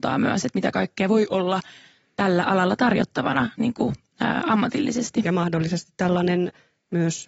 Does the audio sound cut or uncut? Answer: uncut